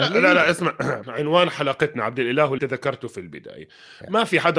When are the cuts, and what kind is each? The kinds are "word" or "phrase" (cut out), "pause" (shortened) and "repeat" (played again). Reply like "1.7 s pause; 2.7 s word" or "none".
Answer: 1.0 s word; 2.6 s word